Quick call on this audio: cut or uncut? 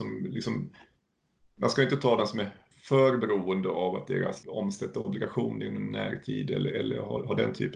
cut